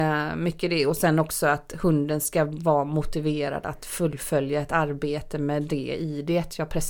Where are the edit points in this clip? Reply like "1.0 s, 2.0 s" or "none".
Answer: none